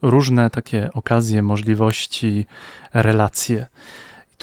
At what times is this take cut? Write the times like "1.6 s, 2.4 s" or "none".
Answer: none